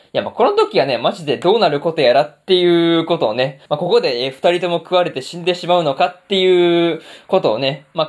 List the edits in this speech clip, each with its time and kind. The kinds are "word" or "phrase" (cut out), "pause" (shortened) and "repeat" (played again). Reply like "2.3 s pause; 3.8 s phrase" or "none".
3.7 s pause